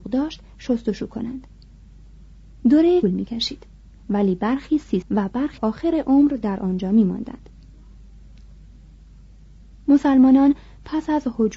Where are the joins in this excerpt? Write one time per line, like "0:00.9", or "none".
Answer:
0:03.0
0:05.0
0:05.6

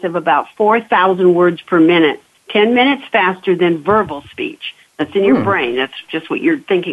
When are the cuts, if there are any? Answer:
0:02.3

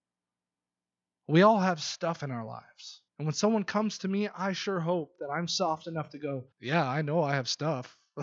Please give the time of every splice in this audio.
0:03.1
0:06.5

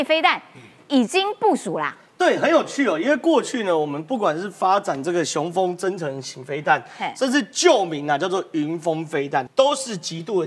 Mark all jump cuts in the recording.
0:09.5

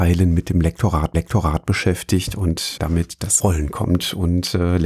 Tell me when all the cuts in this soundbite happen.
0:01.1
0:02.8
0:03.4

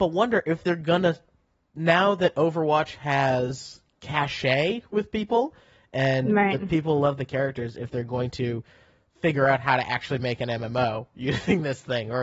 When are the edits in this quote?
none

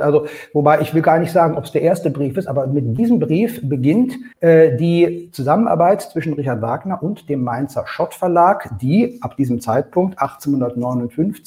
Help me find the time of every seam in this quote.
0:04.3

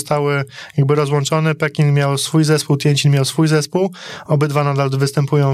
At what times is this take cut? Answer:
none

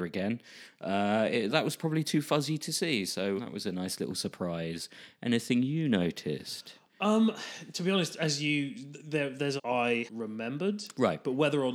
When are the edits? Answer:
0:01.5
0:03.4
0:09.6
0:10.1

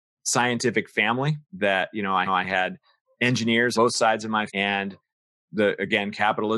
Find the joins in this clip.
0:01.4
0:02.3
0:03.7
0:04.5

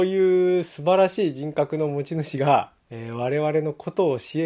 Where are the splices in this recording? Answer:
0:02.8

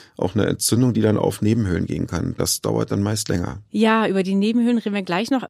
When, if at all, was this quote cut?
none

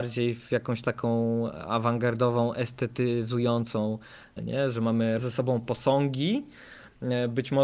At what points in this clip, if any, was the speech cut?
0:04.4
0:05.2

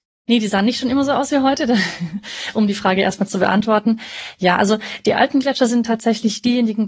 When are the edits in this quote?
none

